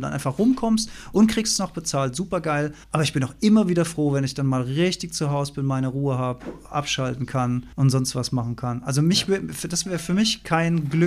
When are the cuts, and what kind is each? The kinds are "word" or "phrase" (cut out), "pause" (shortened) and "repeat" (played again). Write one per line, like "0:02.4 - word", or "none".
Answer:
0:02.8 - pause
0:07.7 - pause